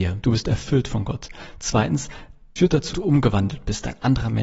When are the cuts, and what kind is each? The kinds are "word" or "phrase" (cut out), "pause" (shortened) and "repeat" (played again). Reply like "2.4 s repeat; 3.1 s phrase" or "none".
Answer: 2.6 s word; 2.9 s word